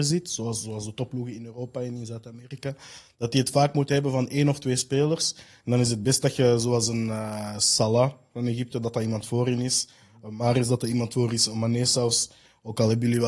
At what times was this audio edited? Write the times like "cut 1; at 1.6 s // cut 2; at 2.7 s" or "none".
none